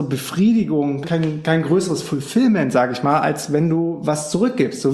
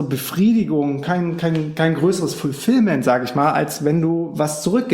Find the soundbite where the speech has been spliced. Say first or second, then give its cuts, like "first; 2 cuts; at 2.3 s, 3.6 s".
first; 1 cut; at 1.0 s